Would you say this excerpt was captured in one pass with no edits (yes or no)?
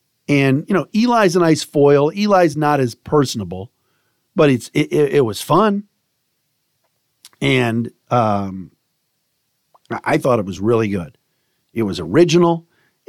yes